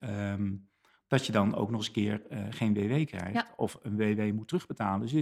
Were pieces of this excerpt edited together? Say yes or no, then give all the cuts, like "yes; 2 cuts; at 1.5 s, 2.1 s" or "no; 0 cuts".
no; 0 cuts